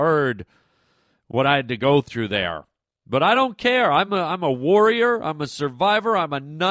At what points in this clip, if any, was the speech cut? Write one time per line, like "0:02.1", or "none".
none